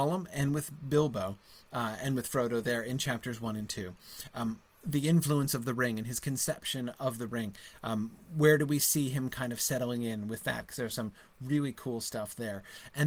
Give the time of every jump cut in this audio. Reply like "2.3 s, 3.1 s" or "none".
none